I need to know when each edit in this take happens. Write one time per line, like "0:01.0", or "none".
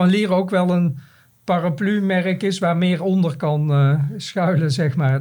none